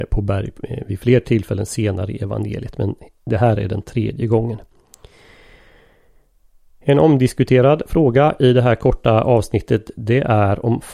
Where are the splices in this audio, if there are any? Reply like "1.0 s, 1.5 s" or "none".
none